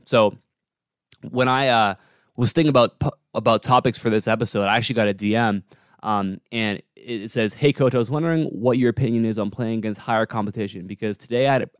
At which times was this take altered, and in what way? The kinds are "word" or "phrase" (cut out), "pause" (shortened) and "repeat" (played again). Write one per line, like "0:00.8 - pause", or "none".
none